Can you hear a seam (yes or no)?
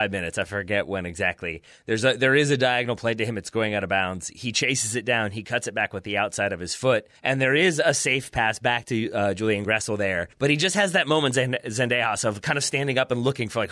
yes